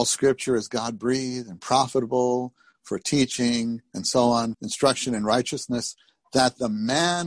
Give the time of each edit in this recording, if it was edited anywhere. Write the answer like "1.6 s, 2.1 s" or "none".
4.5 s